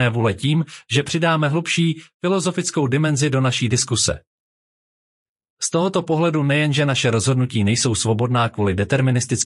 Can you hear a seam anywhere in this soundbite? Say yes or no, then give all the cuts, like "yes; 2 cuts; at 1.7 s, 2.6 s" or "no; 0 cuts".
no; 0 cuts